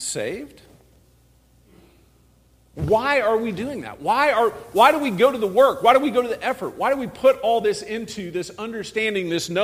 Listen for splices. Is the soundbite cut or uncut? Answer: uncut